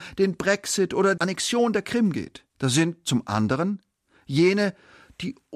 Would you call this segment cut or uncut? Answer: cut